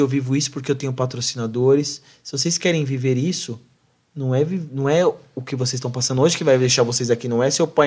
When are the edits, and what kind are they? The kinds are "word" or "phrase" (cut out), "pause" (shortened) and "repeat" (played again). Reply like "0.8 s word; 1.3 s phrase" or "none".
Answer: none